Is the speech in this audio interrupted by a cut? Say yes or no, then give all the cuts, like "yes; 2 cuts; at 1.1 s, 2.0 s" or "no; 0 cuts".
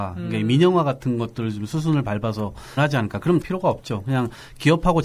yes; 2 cuts; at 2.8 s, 3.4 s